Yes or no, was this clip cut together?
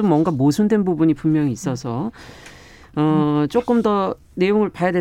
no